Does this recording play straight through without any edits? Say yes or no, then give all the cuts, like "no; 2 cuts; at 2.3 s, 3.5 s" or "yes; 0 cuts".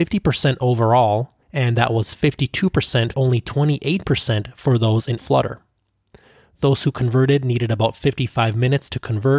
no; 3 cuts; at 1.4 s, 3.1 s, 5.2 s